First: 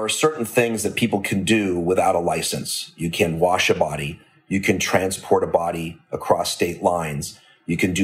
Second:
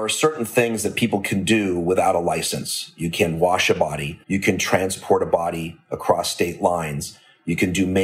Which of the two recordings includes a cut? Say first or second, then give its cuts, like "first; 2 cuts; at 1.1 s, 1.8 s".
second; 1 cut; at 4.2 s